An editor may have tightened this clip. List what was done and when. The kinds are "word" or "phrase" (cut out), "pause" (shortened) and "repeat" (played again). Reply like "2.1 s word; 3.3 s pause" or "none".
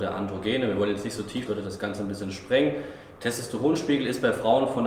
1.5 s phrase